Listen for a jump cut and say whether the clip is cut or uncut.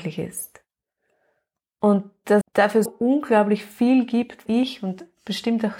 cut